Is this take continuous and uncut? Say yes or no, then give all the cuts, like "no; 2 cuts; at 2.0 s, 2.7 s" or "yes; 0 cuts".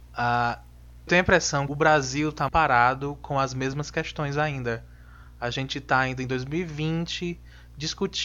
no; 3 cuts; at 1.1 s, 1.7 s, 2.5 s